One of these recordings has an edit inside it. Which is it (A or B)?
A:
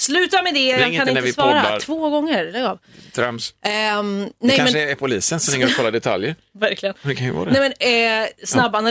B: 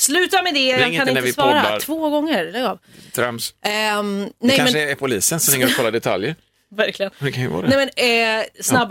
A